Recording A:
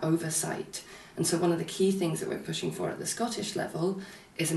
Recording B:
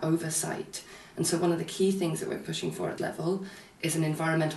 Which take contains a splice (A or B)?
B